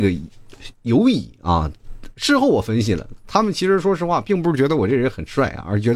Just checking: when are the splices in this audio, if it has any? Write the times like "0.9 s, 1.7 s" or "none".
none